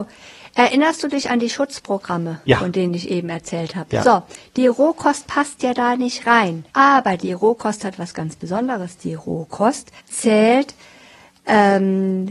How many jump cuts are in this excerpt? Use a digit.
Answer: 2